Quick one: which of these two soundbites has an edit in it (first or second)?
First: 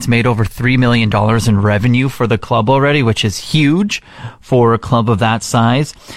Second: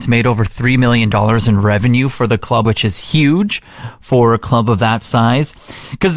second